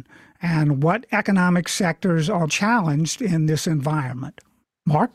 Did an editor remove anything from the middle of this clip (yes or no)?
yes